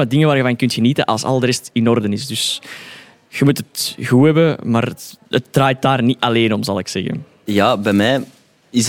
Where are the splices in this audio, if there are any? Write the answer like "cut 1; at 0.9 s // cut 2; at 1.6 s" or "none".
cut 1; at 5.2 s